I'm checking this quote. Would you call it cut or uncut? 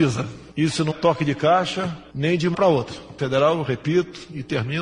cut